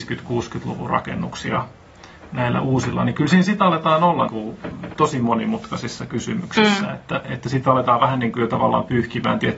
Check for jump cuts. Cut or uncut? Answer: cut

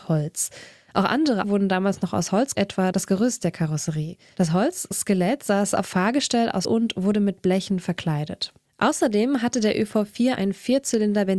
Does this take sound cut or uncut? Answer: cut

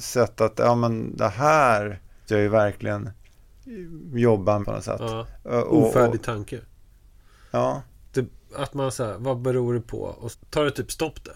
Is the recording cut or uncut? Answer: cut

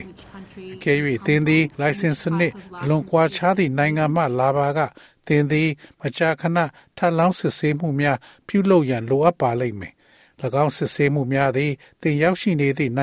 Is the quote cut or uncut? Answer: cut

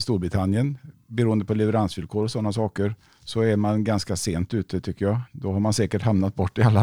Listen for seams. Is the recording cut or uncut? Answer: cut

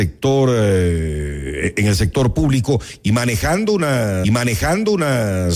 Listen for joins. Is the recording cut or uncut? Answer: cut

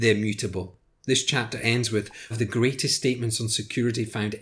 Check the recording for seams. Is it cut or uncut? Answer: cut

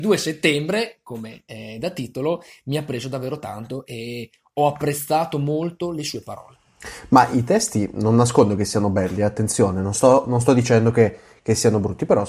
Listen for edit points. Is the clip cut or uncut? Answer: uncut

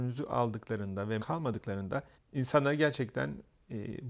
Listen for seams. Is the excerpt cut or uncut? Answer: cut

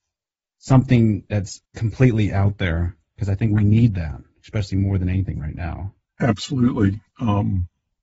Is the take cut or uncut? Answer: cut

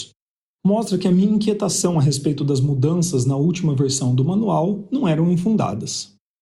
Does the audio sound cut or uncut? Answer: uncut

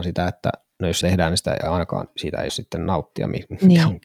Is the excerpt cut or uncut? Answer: cut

